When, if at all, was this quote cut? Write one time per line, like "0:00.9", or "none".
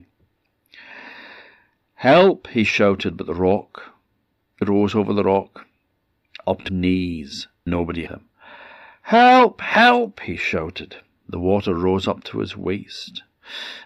0:04.6
0:06.7
0:07.7
0:08.1